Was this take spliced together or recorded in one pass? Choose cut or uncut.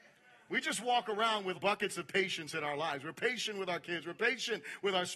cut